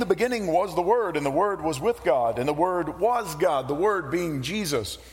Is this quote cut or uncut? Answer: uncut